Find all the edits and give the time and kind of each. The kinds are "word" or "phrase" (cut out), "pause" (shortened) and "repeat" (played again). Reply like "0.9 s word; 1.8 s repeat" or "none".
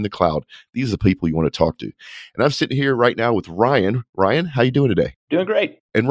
none